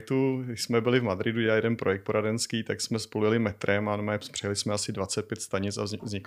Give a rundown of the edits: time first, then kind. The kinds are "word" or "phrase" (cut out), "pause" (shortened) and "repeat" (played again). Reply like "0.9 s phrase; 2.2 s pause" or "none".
none